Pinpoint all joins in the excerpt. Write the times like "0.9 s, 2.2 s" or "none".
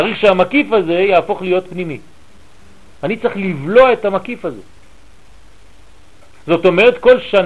none